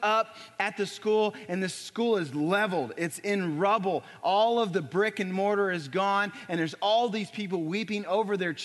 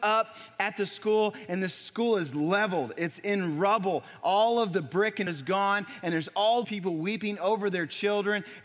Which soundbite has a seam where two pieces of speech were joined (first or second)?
second